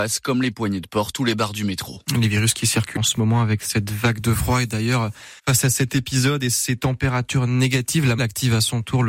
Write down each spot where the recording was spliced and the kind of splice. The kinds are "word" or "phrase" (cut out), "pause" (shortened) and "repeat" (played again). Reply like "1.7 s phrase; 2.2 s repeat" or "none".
3.0 s word; 5.4 s pause; 8.2 s word